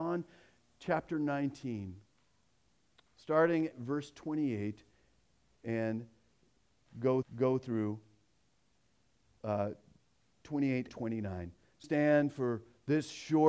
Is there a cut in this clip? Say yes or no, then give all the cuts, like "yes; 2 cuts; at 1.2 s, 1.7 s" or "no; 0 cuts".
yes; 4 cuts; at 3.7 s, 7.2 s, 10.9 s, 11.8 s